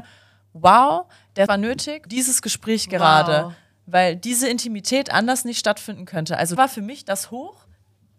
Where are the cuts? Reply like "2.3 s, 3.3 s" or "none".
1.5 s, 2.1 s, 6.6 s

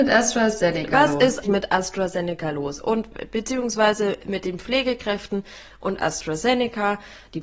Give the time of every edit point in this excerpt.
1.4 s

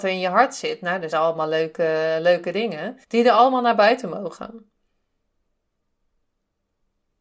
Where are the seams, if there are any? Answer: 1.1 s, 3.0 s

